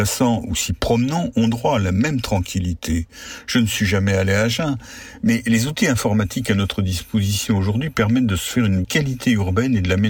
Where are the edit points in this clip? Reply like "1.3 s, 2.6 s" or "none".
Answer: 8.8 s